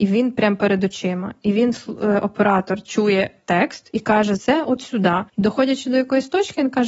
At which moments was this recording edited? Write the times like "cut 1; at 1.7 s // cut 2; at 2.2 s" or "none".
cut 1; at 4.4 s // cut 2; at 5.3 s